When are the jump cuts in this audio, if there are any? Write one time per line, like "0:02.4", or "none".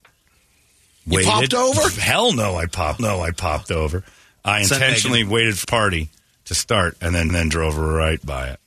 0:03.0
0:05.6
0:07.3